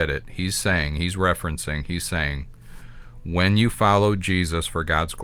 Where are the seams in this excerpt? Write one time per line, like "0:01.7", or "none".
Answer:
none